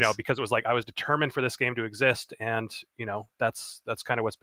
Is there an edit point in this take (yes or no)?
no